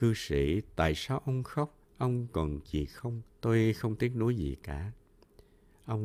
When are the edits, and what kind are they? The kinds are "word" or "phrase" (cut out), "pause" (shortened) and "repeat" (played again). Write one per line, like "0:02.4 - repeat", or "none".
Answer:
0:02.6 - phrase
0:03.3 - pause

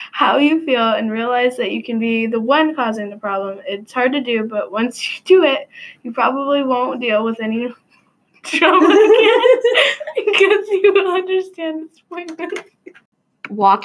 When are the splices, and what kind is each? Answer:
none

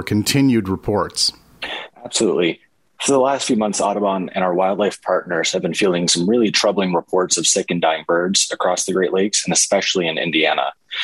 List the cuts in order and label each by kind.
0:01.9 - pause

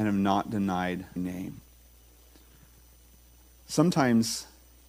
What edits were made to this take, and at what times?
0:01.2 - word

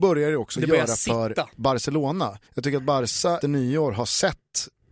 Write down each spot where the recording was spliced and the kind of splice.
0:02.5 - pause
0:03.4 - word

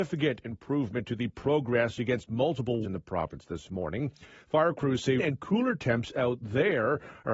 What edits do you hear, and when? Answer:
0:02.8 - word
0:05.2 - word

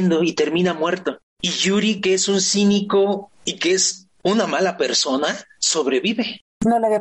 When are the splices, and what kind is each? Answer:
none

